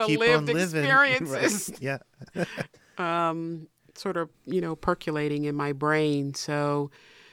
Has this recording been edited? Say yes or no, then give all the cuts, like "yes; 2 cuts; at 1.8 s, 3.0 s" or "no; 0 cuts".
no; 0 cuts